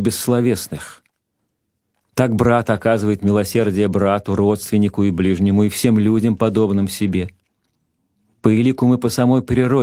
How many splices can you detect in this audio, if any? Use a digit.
0